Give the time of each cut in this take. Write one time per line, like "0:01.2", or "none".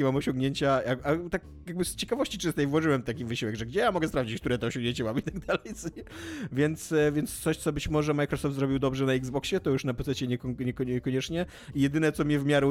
none